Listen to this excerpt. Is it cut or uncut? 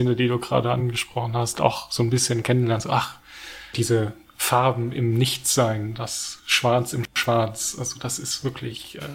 cut